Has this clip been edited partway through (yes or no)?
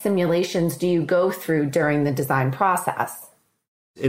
no